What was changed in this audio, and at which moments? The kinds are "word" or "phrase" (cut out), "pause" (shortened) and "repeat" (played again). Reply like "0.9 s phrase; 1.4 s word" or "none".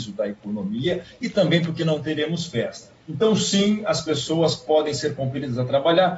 3.0 s pause